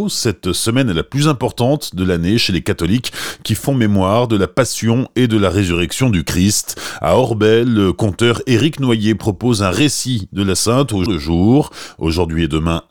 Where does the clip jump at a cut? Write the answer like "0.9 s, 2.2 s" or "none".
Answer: 10.5 s, 11.1 s